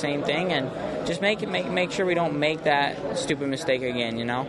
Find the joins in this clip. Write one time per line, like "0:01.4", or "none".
none